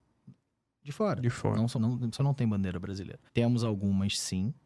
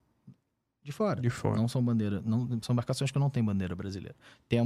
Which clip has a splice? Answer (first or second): first